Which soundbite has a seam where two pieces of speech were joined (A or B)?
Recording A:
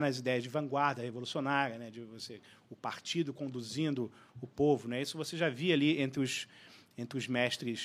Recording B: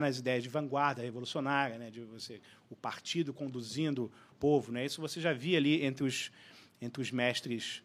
B